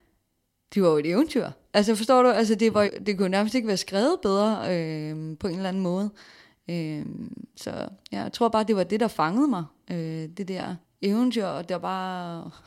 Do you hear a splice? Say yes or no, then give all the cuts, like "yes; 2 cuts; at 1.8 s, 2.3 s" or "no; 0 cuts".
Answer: yes; 2 cuts; at 2.8 s, 10.8 s